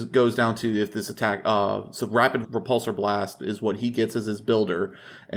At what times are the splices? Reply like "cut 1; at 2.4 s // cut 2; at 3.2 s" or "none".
cut 1; at 2.4 s